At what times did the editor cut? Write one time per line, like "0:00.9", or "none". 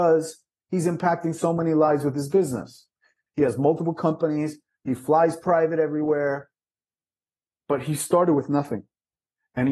none